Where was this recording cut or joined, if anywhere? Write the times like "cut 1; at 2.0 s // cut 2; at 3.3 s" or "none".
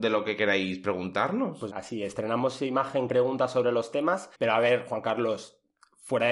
cut 1; at 1.7 s // cut 2; at 3.1 s // cut 3; at 4.3 s